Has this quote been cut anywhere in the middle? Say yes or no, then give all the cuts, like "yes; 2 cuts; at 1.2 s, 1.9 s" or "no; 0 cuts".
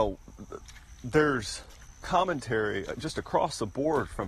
no; 0 cuts